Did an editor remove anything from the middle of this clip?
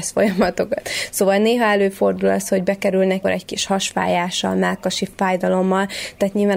yes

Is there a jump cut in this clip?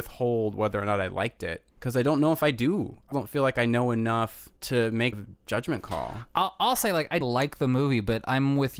yes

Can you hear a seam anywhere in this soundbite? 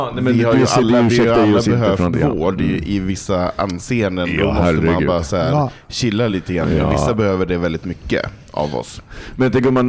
no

